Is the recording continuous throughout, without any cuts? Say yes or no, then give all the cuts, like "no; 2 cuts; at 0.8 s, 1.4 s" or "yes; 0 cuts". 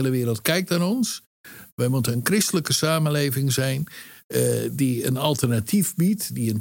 yes; 0 cuts